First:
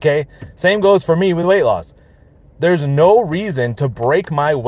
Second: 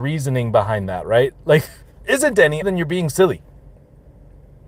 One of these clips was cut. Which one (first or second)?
second